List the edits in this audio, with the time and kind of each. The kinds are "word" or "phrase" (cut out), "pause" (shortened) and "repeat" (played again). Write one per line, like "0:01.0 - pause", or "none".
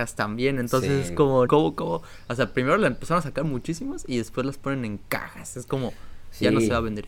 0:01.5 - word